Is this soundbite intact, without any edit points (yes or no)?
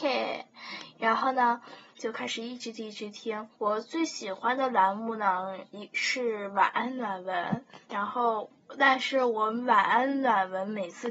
no